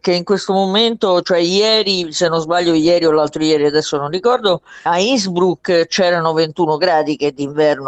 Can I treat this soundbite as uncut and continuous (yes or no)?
no